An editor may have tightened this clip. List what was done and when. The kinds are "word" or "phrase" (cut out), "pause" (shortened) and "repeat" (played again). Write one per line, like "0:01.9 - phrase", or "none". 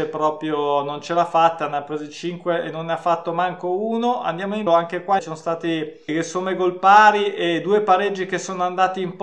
0:04.7 - word
0:05.2 - word
0:06.1 - word